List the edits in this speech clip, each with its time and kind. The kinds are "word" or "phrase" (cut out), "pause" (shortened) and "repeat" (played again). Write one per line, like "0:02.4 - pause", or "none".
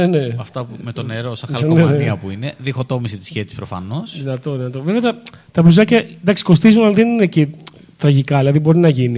none